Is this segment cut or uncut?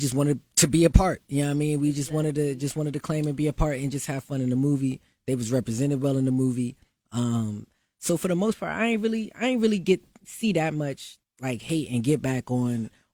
cut